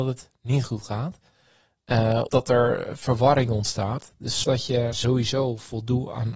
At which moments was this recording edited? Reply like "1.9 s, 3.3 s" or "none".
2.3 s, 4.4 s, 4.9 s